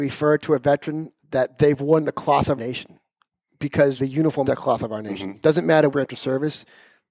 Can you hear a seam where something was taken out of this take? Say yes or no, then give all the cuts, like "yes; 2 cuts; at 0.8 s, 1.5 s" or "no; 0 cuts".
yes; 4 cuts; at 2.6 s, 4.0 s, 4.4 s, 5.9 s